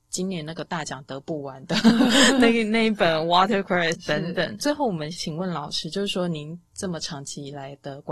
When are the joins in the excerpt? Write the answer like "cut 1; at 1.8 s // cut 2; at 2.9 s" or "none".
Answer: cut 1; at 3.9 s